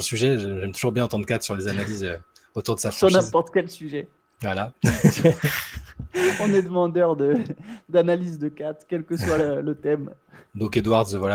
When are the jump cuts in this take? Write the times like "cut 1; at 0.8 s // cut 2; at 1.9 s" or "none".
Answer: none